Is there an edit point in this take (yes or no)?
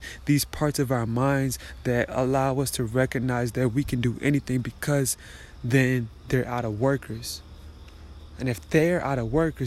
no